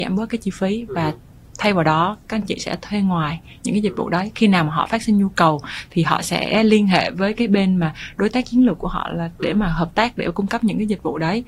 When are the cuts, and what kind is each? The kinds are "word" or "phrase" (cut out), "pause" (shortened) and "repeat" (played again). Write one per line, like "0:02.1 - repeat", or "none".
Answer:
none